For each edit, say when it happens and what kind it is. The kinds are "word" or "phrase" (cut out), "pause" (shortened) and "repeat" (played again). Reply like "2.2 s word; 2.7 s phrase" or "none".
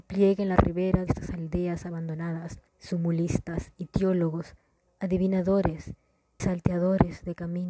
1.1 s word; 2.7 s pause; 6.4 s word